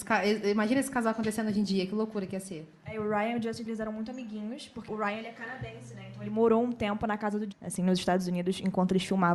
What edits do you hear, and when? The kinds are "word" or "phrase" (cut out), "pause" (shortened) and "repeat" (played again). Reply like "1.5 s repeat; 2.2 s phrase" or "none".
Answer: 3.7 s word; 4.9 s word; 7.5 s word